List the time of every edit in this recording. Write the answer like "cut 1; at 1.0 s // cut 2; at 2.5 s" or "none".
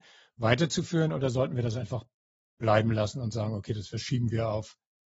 none